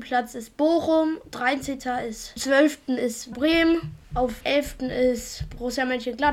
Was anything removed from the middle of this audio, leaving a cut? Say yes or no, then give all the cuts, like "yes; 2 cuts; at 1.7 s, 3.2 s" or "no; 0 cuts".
yes; 3 cuts; at 2.4 s, 3.3 s, 4.4 s